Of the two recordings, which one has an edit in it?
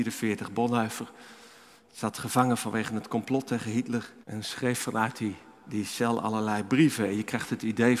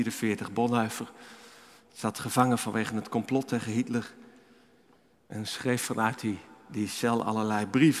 first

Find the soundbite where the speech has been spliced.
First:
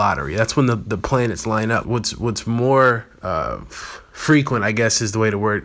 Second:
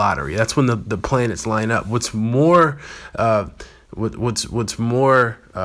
first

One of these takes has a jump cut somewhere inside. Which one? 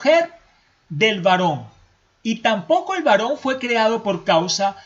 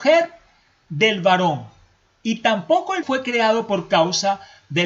second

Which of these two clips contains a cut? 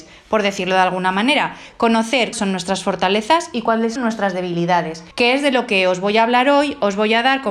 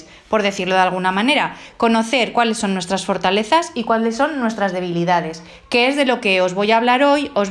first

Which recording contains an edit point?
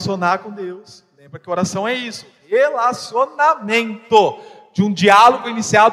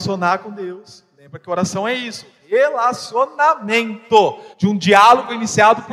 second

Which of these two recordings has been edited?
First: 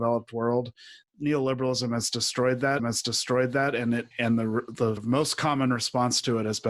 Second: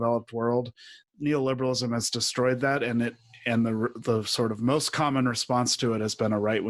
first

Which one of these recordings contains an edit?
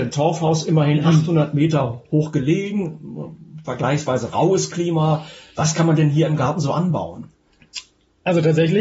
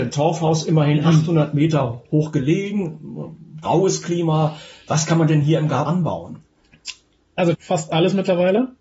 second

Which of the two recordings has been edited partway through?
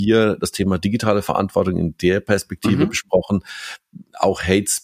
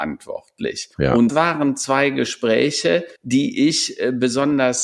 second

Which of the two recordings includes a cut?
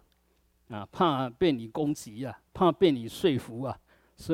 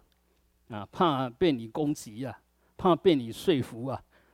first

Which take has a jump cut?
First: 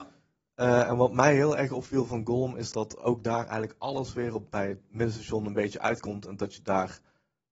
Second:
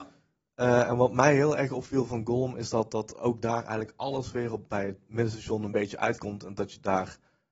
first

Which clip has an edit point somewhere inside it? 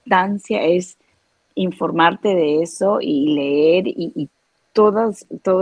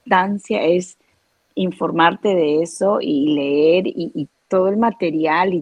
second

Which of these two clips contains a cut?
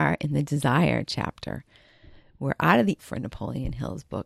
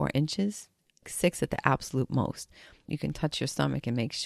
first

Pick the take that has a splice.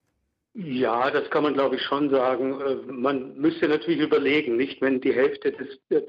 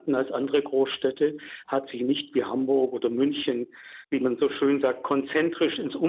second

